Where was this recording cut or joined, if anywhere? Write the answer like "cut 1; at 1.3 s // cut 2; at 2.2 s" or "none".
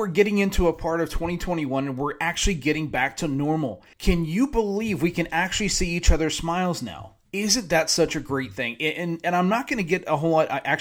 cut 1; at 3.9 s // cut 2; at 7.3 s